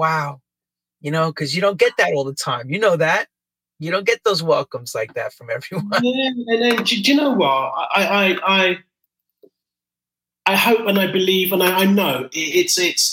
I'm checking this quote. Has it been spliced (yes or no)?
no